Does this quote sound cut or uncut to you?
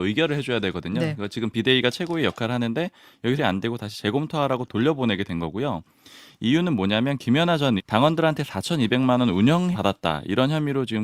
cut